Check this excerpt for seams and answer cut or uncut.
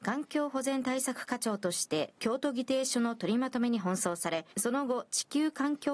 cut